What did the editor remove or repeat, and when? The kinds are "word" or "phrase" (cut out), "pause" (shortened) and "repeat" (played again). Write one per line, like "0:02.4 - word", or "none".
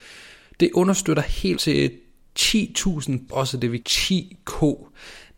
0:01.5 - word
0:03.3 - word
0:03.8 - word